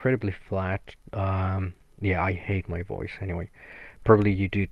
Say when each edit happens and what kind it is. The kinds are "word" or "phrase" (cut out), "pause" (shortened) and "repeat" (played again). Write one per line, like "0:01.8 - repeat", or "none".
none